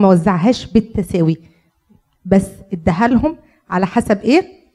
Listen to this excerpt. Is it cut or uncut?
uncut